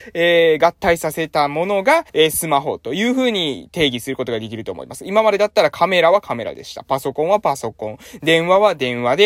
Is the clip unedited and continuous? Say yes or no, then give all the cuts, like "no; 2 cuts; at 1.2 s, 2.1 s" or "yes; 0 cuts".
no; 1 cut; at 2.1 s